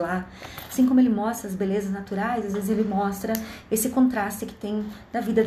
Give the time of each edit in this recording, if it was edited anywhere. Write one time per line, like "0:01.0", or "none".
none

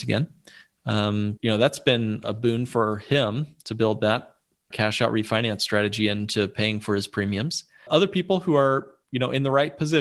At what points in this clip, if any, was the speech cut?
0:01.4
0:02.2
0:04.7
0:07.9

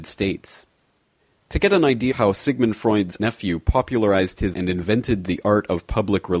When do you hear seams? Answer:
0:02.1
0:03.2
0:04.5

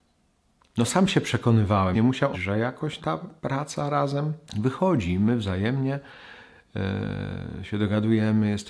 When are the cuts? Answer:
0:01.9
0:02.3
0:03.0
0:03.4
0:04.5

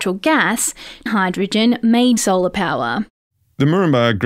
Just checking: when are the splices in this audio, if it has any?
0:01.1
0:02.2

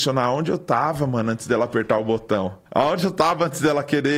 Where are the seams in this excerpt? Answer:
0:02.7

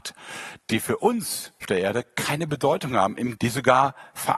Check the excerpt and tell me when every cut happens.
0:01.6
0:03.4

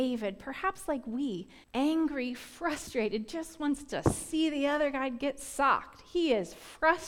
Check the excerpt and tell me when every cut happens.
0:01.6

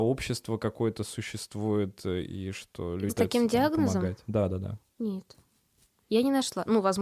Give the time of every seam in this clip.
0:03.1

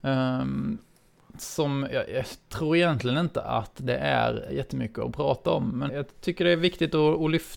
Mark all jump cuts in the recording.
0:04.5
0:05.9

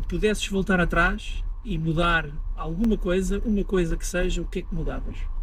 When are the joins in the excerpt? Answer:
none

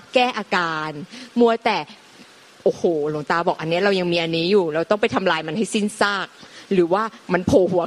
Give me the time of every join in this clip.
none

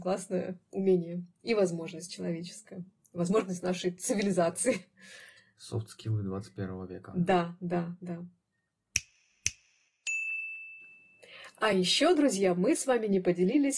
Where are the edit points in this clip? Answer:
none

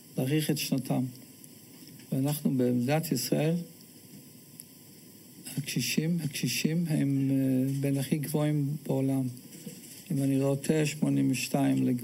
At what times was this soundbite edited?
0:02.0
0:06.2

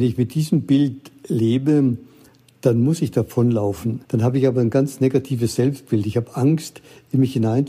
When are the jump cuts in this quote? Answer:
0:04.0

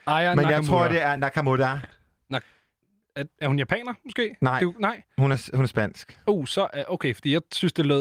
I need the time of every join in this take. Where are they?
none

